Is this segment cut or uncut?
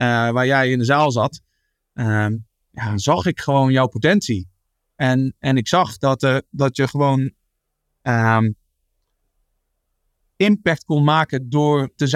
uncut